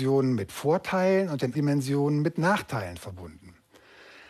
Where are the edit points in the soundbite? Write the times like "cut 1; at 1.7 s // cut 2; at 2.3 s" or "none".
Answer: cut 1; at 1.5 s

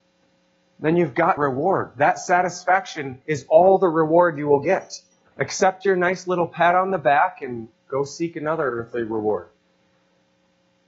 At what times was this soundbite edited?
cut 1; at 1.4 s // cut 2; at 3.2 s

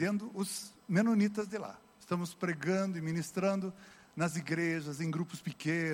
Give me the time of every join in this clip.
none

